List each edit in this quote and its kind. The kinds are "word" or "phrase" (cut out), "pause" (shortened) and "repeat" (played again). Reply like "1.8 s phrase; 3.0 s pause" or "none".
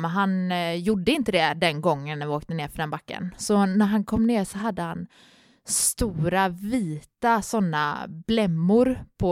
none